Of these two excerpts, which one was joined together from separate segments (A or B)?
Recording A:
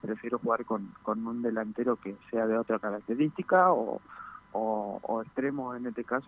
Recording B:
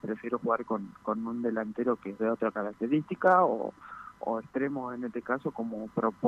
B